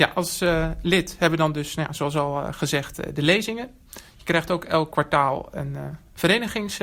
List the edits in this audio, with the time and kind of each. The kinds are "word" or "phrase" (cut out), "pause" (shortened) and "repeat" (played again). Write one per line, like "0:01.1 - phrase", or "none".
0:04.9 - word